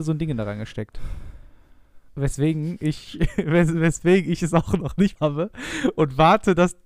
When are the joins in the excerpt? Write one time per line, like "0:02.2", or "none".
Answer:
0:02.1
0:05.2